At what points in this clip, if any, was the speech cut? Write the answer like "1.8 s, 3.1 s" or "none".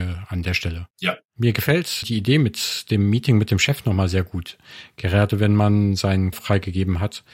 0.9 s, 2.0 s, 6.3 s